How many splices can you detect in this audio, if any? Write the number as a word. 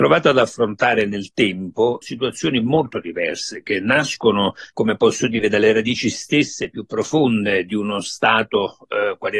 two